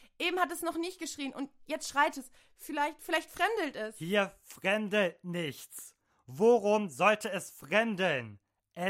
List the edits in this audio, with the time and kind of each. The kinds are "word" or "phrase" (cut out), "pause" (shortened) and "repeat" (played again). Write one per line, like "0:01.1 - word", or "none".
none